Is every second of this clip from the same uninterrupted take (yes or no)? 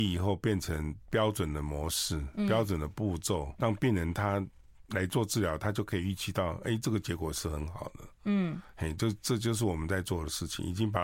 no